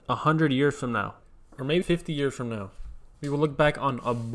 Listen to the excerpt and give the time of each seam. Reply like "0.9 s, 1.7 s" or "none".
1.8 s